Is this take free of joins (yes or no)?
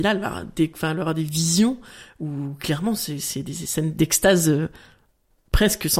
yes